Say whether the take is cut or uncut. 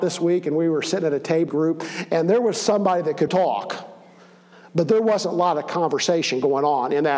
cut